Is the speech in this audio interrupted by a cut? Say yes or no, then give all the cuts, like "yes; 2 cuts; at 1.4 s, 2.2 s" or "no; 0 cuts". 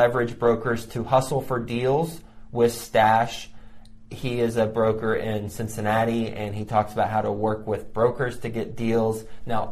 no; 0 cuts